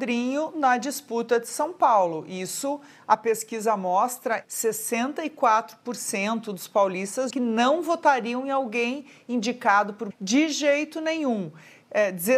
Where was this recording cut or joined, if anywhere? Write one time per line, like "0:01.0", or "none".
0:07.3
0:10.1